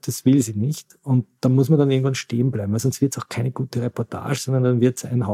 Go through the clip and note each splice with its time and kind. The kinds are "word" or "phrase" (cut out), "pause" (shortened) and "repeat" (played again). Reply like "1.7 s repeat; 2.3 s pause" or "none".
none